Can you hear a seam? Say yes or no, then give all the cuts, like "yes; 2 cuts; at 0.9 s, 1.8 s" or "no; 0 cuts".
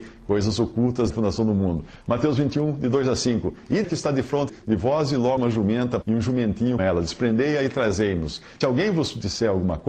yes; 7 cuts; at 1.1 s, 3.8 s, 4.5 s, 5.4 s, 6.0 s, 6.8 s, 8.6 s